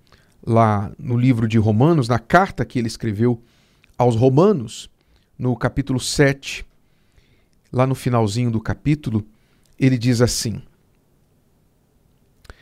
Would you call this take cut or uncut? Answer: uncut